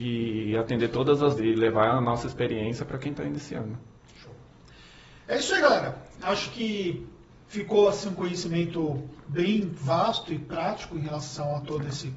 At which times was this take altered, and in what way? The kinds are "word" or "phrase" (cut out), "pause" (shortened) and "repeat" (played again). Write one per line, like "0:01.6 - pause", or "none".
0:01.4 - word